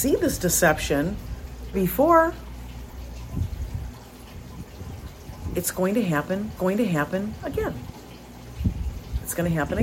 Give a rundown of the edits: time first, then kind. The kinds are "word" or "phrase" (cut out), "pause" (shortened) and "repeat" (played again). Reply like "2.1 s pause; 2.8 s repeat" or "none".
1.7 s phrase; 6.6 s repeat